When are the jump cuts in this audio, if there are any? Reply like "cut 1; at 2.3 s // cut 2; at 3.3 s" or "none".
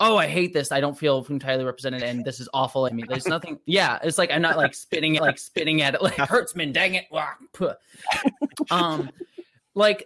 cut 1; at 2.9 s // cut 2; at 5.2 s // cut 3; at 6.2 s // cut 4; at 8.2 s